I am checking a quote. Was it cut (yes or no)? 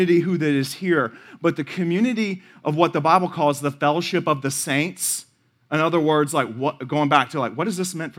no